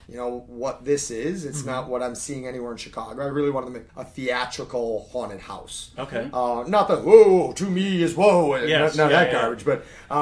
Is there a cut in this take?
yes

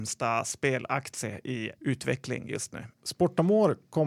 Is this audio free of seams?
no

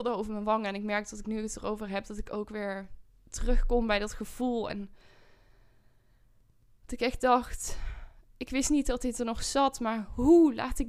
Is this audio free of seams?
yes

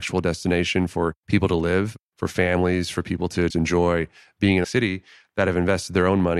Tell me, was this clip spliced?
yes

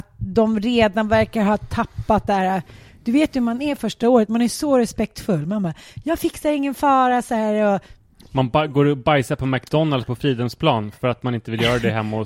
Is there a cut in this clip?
no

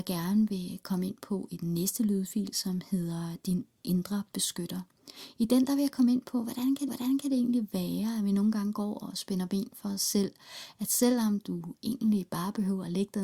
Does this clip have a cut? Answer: yes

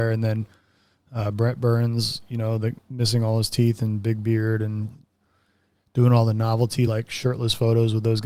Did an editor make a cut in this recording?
no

